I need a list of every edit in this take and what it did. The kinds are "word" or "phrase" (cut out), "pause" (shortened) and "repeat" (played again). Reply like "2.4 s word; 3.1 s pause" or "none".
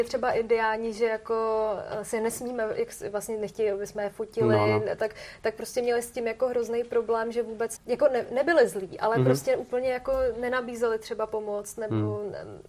7.8 s word